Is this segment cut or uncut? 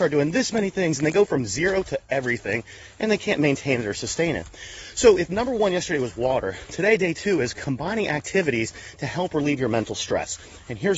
uncut